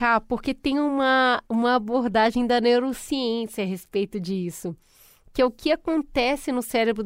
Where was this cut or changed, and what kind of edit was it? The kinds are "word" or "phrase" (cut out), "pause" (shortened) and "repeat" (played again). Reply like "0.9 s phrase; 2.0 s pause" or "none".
none